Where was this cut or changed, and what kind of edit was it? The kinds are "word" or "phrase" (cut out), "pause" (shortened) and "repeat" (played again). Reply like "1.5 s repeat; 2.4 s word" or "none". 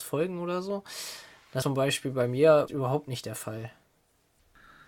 1.6 s word; 2.7 s word